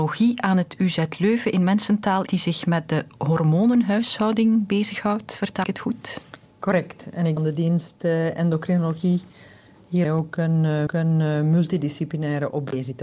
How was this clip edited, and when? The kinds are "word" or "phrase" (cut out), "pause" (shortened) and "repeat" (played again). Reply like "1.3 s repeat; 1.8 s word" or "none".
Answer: 2.3 s word; 5.6 s word; 6.5 s pause; 7.4 s phrase; 10.0 s phrase; 10.9 s repeat

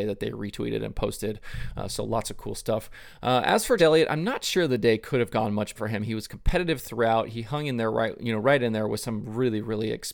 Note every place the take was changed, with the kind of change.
3.8 s word; 5.7 s word

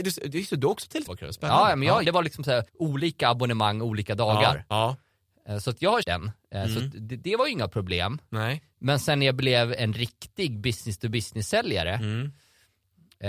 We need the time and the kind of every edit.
1.1 s word; 2.0 s phrase; 2.7 s pause; 6.0 s word

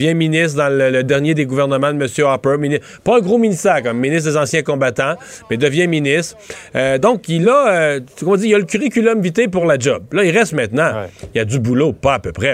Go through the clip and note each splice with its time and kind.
none

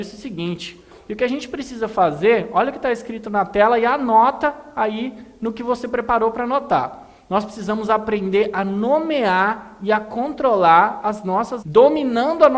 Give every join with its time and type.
11.6 s word

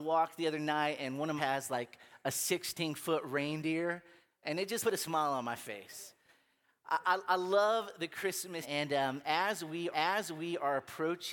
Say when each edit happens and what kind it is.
1.4 s phrase; 4.8 s word; 8.6 s word; 9.9 s repeat

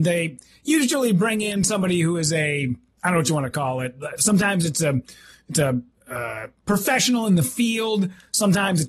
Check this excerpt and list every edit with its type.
none

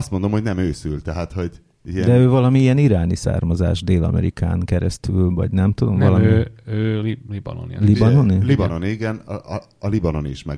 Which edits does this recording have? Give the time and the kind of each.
none

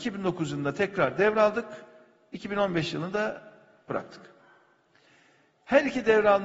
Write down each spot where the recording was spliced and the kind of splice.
none

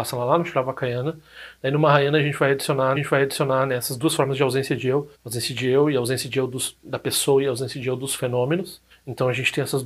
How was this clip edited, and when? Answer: 3.0 s repeat; 5.1 s pause; 6.8 s word; 8.9 s pause

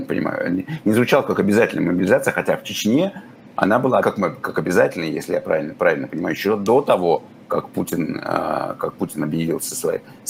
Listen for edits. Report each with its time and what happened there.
4.0 s word

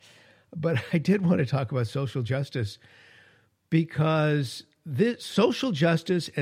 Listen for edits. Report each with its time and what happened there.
none

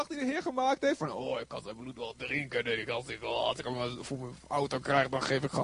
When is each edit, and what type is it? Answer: none

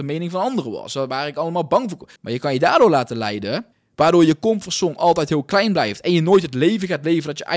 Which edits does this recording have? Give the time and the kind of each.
2.2 s pause; 3.7 s pause

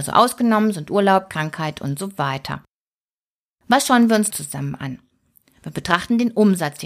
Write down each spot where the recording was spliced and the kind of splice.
3.1 s pause; 4.3 s word

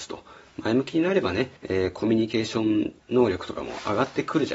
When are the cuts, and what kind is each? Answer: 1.6 s pause; 3.0 s pause

